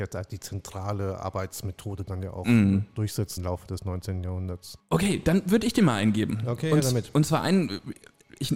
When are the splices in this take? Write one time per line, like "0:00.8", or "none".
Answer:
0:03.4